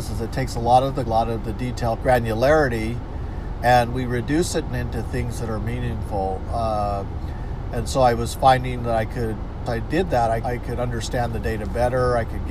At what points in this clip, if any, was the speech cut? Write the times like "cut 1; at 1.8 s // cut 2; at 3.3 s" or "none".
cut 1; at 1.1 s // cut 2; at 2.0 s // cut 3; at 4.7 s // cut 4; at 9.7 s // cut 5; at 10.4 s